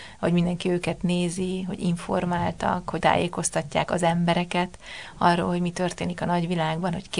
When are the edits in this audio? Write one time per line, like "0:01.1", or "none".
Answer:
0:03.0

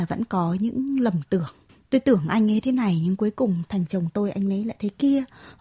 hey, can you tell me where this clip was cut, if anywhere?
0:01.7

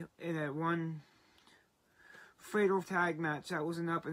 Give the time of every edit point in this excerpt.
0:02.8

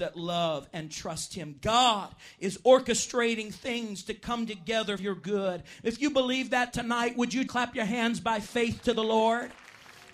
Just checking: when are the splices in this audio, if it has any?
0:05.0
0:07.5

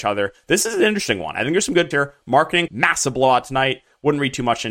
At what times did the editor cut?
0:01.9
0:02.7

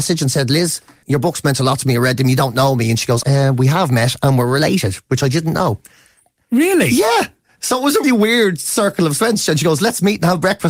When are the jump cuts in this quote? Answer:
0:01.0
0:03.2
0:08.0

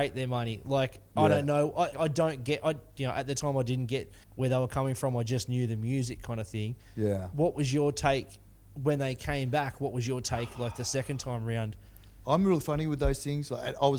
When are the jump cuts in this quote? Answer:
0:01.9
0:04.2

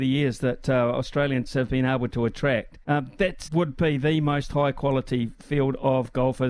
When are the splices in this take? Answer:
0:01.4
0:02.8
0:03.4

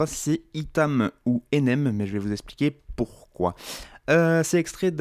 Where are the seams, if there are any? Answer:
none

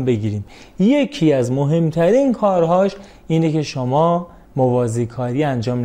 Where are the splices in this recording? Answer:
none

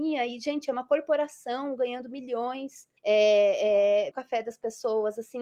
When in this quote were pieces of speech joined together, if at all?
0:03.0
0:04.1

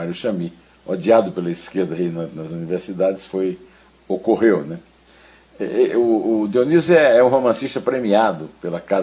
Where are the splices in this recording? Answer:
none

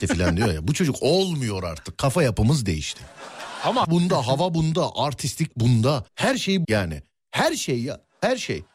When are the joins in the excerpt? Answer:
0:03.8
0:06.1
0:06.6

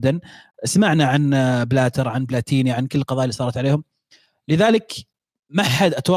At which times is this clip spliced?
none

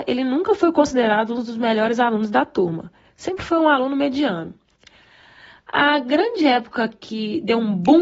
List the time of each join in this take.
none

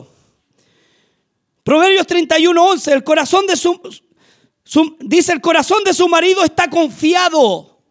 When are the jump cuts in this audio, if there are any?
none

